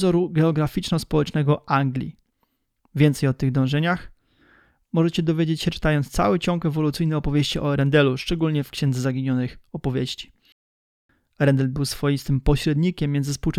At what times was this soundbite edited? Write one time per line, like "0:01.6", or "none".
none